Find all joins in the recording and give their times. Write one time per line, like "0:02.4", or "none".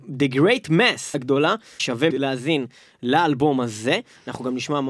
0:01.1
0:02.1